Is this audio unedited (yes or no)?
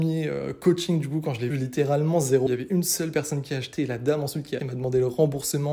no